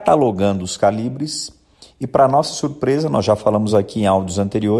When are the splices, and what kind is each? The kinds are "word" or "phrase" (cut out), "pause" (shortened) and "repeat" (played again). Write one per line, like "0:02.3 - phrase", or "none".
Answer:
none